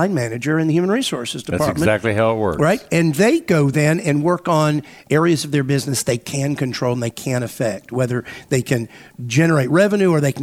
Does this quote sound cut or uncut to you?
uncut